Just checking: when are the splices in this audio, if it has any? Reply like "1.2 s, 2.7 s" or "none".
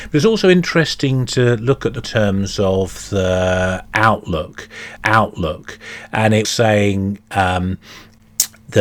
2.0 s, 5.0 s, 6.4 s